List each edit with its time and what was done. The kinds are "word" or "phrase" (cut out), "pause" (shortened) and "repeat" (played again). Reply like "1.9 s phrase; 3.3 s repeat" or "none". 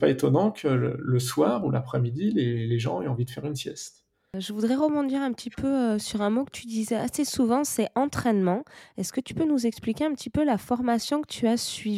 none